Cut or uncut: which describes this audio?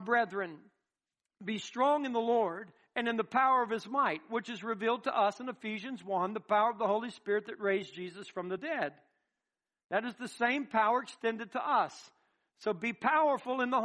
uncut